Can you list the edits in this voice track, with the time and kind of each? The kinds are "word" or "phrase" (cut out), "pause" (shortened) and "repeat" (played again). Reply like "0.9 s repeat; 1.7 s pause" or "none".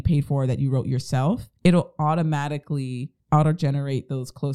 1.6 s pause; 3.2 s pause